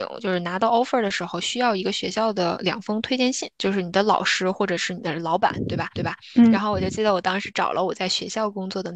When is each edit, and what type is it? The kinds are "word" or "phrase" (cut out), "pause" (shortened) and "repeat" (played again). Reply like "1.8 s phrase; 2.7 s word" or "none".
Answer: 3.5 s pause; 6.0 s repeat